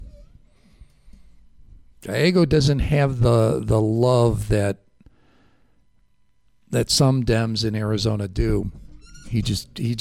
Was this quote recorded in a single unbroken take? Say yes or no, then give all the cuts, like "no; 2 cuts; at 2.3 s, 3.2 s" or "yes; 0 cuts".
yes; 0 cuts